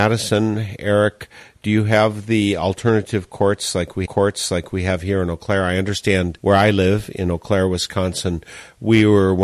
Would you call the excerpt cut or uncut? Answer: cut